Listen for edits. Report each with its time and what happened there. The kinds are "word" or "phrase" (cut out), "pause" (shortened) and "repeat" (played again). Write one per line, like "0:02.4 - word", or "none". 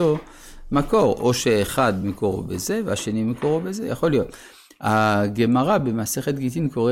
none